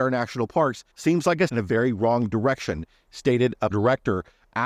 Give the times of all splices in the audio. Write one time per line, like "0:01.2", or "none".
0:00.9
0:01.5
0:03.7